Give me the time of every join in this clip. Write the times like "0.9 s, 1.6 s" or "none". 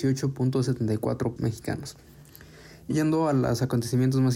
1.4 s, 2.9 s